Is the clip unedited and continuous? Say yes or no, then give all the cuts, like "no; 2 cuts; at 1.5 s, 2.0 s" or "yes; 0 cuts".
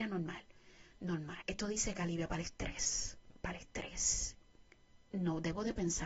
no; 2 cuts; at 1.4 s, 3.3 s